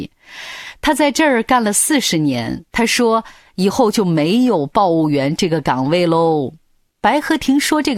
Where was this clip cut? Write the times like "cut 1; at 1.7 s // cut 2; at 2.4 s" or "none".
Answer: cut 1; at 2.7 s